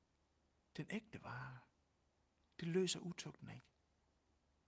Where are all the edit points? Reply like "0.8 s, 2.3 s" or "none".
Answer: none